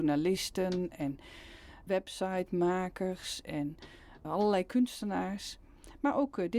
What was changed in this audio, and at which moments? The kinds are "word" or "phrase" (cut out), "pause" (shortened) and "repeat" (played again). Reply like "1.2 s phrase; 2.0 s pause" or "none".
1.9 s word; 4.2 s word